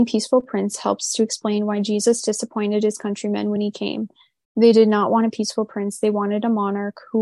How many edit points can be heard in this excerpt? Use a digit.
0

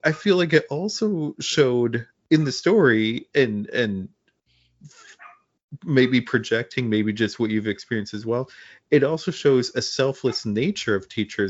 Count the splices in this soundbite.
0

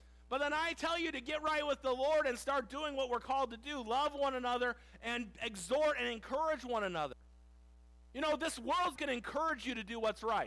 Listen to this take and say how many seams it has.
1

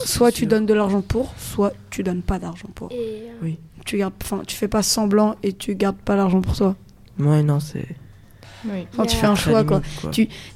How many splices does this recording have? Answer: 0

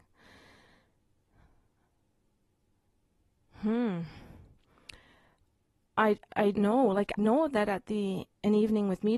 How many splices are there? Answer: 2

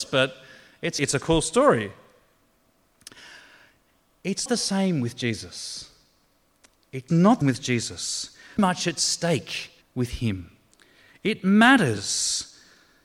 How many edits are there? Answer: 7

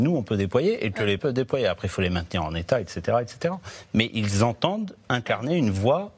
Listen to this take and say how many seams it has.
1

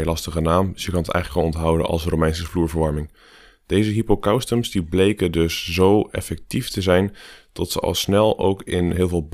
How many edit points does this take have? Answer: 0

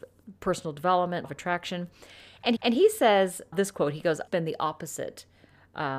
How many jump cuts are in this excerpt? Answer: 4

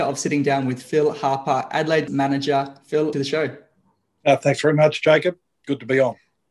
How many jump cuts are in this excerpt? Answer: 2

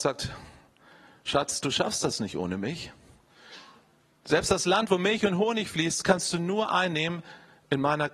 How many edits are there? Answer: 0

